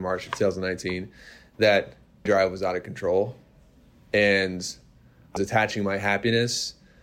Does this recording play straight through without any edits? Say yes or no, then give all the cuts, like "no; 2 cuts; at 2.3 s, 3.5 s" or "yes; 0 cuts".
no; 2 cuts; at 2.3 s, 5.4 s